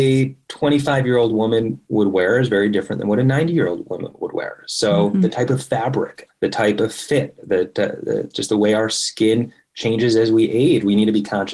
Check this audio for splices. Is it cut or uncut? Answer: uncut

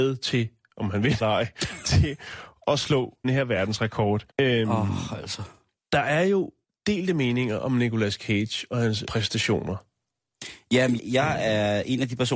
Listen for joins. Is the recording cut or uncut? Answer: cut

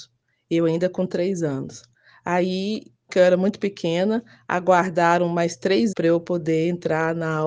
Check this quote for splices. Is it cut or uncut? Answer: cut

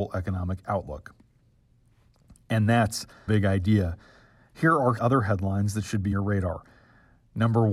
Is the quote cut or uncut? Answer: cut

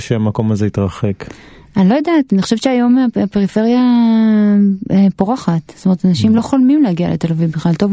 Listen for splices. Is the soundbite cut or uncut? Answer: uncut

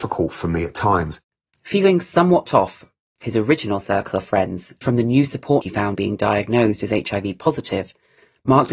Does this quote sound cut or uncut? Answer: cut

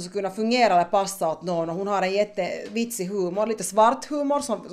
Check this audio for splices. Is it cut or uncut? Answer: uncut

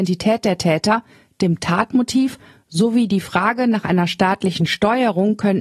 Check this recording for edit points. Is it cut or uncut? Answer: uncut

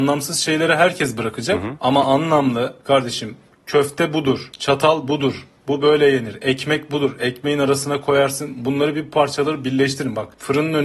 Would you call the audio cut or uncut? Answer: uncut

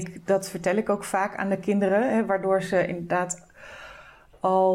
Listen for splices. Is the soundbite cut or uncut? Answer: uncut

